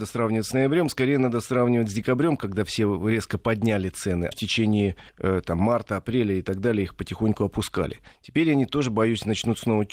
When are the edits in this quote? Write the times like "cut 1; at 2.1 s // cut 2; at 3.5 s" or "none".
cut 1; at 4.3 s // cut 2; at 5.1 s // cut 3; at 8.1 s